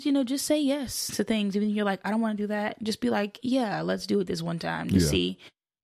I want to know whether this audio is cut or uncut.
uncut